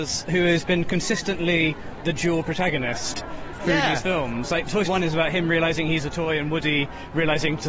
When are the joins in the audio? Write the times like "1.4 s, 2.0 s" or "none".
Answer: 2.0 s, 4.9 s